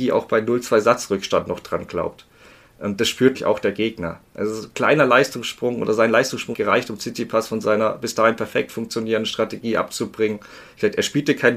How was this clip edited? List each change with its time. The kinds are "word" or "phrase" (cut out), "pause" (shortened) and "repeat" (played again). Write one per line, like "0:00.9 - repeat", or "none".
0:03.3 - word
0:06.5 - word